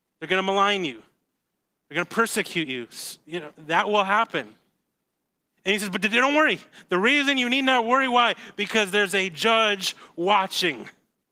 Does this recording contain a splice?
no; 0 cuts

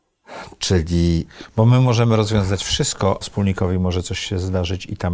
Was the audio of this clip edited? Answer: yes; 1 cut; at 3.2 s

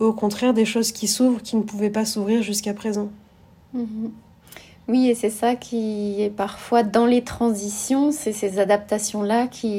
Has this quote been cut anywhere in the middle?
no; 0 cuts

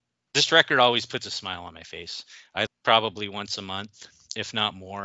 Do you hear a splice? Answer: yes; 1 cut; at 2.7 s

